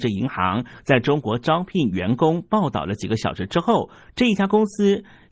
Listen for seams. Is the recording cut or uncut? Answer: uncut